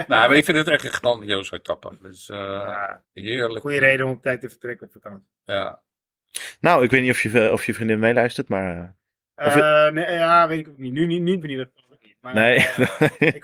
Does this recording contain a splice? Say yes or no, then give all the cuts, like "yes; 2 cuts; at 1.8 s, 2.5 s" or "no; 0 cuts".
yes; 2 cuts; at 3.0 s, 11.4 s